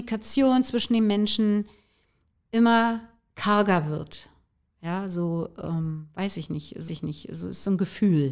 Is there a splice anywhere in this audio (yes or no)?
yes